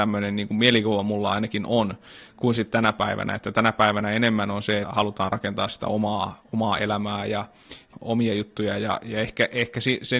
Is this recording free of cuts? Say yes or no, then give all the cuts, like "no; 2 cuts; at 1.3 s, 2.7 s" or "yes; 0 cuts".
no; 1 cut; at 4.8 s